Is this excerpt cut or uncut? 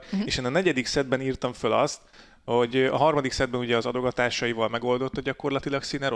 uncut